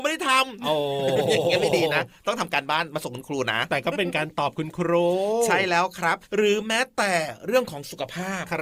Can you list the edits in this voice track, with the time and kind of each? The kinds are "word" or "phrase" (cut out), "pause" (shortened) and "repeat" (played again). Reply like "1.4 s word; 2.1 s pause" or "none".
6.2 s pause